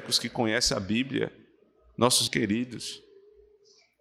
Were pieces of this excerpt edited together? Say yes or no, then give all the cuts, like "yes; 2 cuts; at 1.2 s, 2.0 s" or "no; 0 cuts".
yes; 1 cut; at 2.3 s